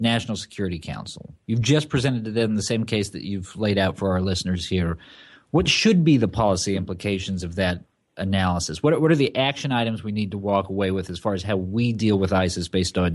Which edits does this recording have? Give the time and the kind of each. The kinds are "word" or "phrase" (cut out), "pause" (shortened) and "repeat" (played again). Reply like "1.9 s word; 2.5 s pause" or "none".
none